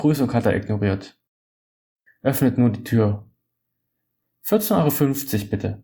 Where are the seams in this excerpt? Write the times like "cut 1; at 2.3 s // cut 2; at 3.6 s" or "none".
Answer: none